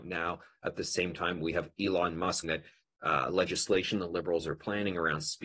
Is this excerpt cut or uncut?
cut